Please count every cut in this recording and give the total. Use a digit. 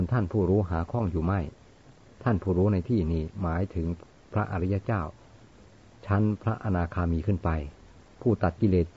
0